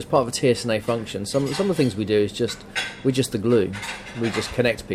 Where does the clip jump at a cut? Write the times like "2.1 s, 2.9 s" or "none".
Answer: none